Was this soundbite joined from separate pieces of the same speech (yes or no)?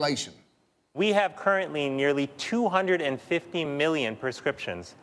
no